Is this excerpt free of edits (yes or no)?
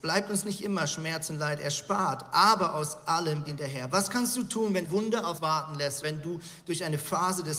no